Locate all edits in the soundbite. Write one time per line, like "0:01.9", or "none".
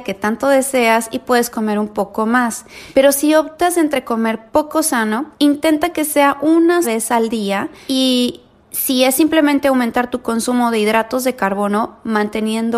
0:06.8

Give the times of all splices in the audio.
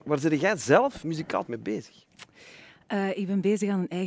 0:01.5

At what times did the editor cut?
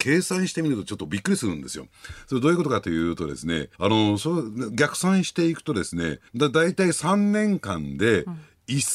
0:03.7
0:06.3

